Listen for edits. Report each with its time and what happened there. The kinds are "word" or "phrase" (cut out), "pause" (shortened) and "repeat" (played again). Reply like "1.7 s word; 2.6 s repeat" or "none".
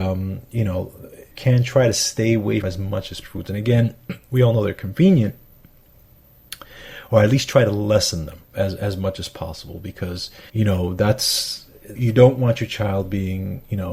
1.3 s phrase; 2.6 s word; 3.2 s phrase; 8.4 s pause; 10.5 s pause; 12.0 s word